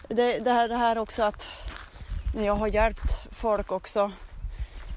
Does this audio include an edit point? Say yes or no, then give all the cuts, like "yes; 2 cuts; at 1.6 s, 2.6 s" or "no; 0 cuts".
no; 0 cuts